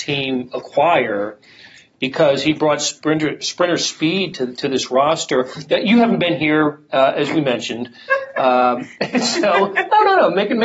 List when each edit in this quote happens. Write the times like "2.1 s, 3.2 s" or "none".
none

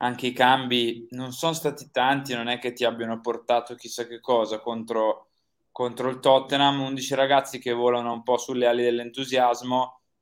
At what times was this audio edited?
none

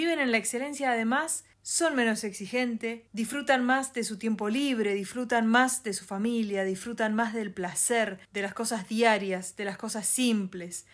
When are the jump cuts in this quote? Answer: 1.5 s, 3.1 s, 8.2 s

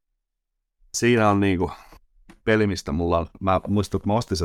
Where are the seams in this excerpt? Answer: 2.4 s

